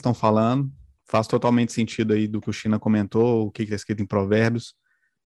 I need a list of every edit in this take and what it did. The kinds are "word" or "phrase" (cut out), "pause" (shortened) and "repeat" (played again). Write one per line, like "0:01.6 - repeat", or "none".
0:02.4 - word